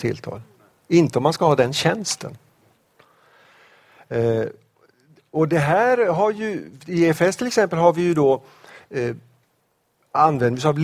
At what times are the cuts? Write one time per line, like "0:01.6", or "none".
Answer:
none